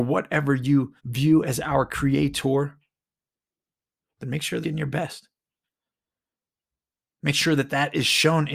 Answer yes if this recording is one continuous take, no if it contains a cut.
no